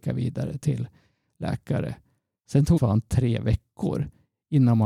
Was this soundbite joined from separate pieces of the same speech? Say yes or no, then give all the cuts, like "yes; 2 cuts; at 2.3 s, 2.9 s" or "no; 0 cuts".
yes; 1 cut; at 2.8 s